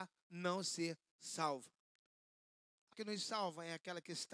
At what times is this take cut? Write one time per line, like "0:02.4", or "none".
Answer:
0:02.9